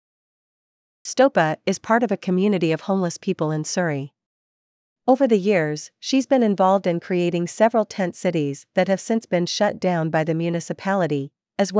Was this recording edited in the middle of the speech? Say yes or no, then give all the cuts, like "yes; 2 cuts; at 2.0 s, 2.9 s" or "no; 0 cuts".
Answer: no; 0 cuts